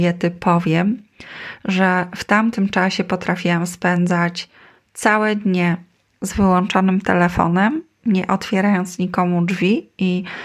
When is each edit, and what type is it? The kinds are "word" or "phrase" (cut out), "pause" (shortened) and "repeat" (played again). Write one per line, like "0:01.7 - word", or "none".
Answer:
none